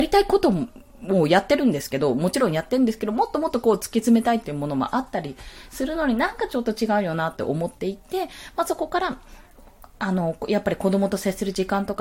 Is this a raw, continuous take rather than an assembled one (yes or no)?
yes